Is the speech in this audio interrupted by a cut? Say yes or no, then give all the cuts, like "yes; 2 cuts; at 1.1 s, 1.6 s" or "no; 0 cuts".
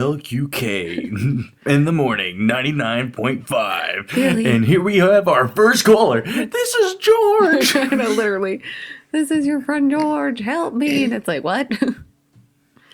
no; 0 cuts